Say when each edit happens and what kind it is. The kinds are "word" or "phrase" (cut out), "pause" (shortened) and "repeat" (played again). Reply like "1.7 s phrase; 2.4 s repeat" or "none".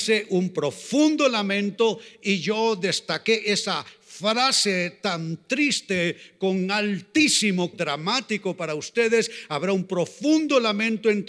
7.7 s word